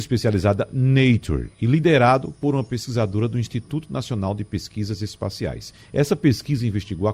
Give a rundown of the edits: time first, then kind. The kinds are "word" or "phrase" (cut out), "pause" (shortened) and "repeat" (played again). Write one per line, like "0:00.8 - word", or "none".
0:01.5 - pause